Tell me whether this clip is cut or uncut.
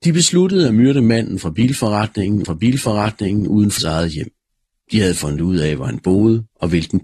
cut